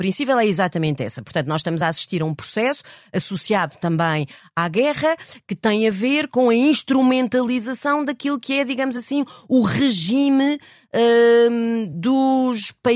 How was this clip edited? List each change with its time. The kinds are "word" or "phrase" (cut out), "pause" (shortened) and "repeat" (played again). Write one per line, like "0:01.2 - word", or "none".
none